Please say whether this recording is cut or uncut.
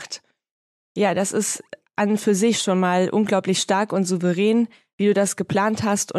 uncut